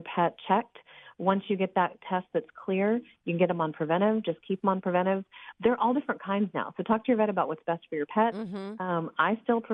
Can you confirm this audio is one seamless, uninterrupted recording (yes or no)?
yes